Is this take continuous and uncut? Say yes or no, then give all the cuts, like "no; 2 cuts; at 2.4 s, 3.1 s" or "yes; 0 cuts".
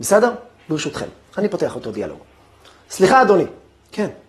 yes; 0 cuts